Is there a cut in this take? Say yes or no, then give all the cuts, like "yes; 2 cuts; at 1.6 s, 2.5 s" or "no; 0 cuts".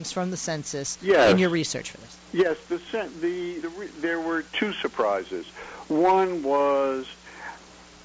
yes; 1 cut; at 3.6 s